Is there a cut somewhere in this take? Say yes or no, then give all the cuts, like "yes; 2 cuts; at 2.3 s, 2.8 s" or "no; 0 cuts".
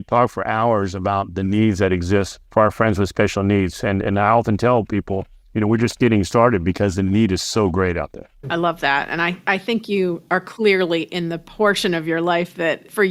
yes; 2 cuts; at 2.4 s, 8.4 s